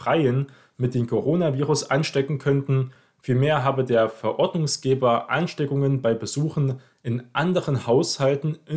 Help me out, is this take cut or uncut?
uncut